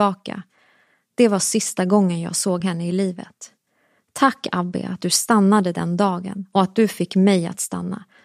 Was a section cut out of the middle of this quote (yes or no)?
no